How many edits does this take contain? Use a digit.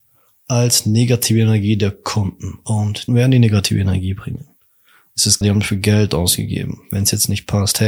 2